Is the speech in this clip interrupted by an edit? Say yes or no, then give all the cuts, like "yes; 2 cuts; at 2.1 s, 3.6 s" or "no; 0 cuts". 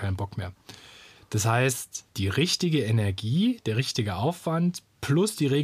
yes; 1 cut; at 2.1 s